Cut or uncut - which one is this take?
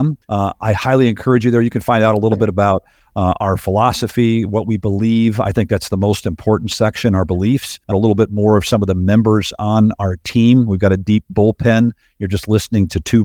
cut